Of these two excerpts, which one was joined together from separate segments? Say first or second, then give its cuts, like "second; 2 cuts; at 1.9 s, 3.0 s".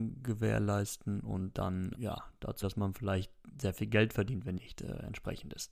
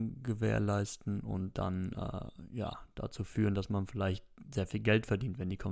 first; 3 cuts; at 1.9 s, 2.6 s, 4.6 s